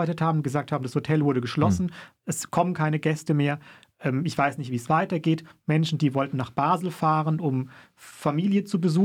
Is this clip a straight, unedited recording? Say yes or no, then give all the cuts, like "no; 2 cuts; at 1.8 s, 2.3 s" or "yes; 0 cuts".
yes; 0 cuts